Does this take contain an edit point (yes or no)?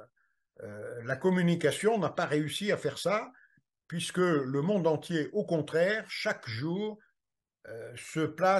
no